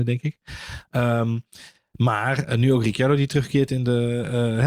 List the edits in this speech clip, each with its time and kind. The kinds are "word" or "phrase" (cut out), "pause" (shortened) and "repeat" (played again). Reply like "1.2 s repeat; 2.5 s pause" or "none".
none